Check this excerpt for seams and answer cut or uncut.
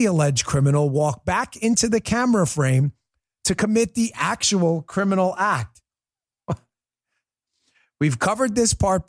uncut